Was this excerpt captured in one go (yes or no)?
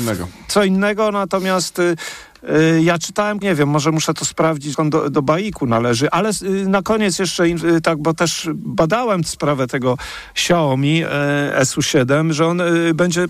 no